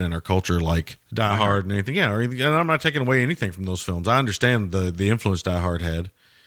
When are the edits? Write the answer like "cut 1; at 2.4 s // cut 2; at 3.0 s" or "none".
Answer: cut 1; at 1.0 s